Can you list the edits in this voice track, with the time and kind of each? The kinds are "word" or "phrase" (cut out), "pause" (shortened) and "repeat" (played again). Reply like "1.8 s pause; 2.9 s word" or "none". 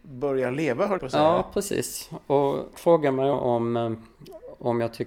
1.0 s word; 2.7 s word; 3.3 s word